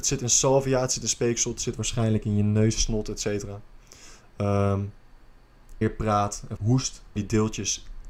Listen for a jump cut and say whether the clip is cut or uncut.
cut